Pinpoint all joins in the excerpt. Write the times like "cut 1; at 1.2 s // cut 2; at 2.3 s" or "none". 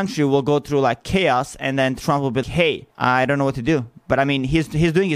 cut 1; at 2.4 s // cut 2; at 2.9 s